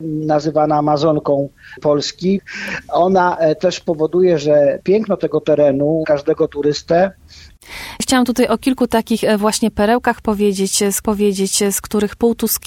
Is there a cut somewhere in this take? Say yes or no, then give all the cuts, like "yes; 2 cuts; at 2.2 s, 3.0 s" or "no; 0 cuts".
yes; 2 cuts; at 6.0 s, 11.0 s